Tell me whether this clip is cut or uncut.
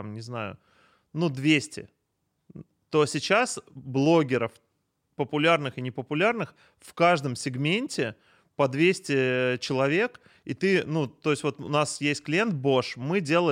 uncut